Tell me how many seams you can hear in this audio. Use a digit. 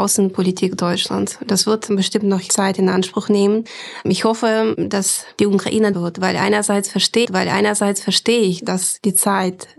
2